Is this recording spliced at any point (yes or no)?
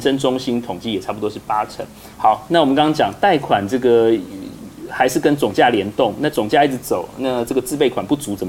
yes